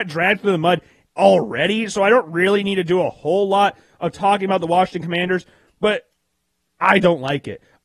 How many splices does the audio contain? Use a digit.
0